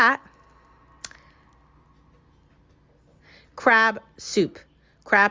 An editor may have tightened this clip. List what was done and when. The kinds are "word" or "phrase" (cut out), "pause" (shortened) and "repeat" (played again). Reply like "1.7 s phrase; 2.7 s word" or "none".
none